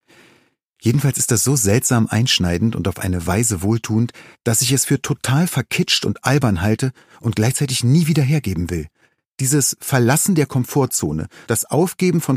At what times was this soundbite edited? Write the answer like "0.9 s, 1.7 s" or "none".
none